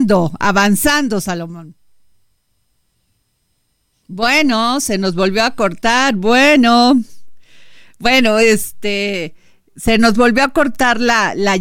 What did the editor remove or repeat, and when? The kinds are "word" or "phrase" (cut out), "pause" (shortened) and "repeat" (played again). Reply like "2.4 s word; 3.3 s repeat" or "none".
none